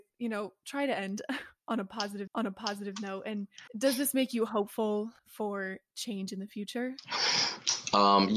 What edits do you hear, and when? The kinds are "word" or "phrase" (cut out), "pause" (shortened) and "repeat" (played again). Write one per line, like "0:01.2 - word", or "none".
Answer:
0:02.3 - repeat
0:03.7 - pause
0:05.2 - pause